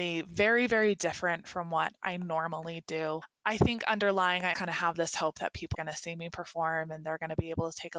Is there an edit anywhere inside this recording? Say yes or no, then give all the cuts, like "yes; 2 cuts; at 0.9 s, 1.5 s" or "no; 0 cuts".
yes; 2 cuts; at 4.5 s, 5.7 s